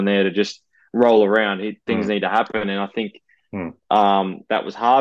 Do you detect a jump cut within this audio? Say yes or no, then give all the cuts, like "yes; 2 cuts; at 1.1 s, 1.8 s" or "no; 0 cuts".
yes; 1 cut; at 3.8 s